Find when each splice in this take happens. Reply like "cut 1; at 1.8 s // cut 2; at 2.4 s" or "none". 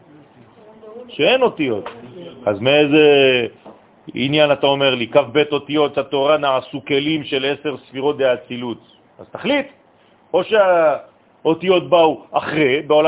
none